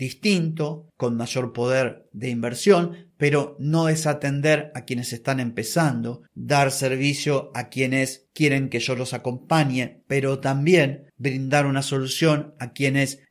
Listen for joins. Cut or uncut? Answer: uncut